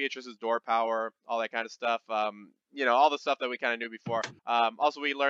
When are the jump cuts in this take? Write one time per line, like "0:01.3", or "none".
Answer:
0:02.6
0:04.4